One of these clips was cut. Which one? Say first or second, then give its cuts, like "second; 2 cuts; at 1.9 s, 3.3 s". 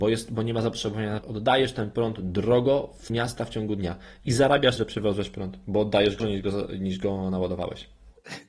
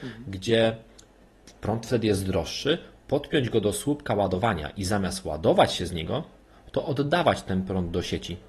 first; 4 cuts; at 1.2 s, 3.1 s, 4.8 s, 6.2 s